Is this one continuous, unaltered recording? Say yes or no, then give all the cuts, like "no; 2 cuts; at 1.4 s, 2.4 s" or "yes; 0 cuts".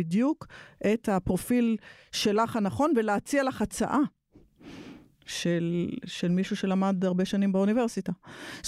yes; 0 cuts